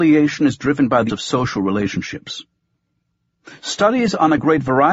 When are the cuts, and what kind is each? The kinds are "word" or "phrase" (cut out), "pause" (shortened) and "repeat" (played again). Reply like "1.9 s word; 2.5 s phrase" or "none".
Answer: 1.1 s word